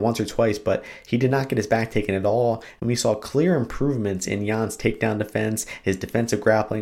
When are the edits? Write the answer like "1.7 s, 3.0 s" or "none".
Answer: none